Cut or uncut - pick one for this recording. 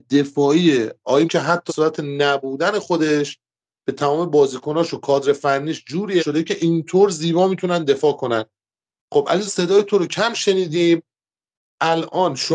cut